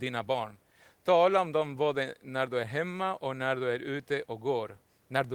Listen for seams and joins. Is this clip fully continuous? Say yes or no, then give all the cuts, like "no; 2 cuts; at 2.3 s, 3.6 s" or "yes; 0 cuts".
yes; 0 cuts